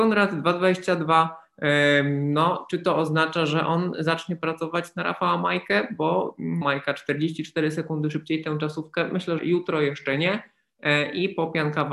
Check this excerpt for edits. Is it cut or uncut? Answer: cut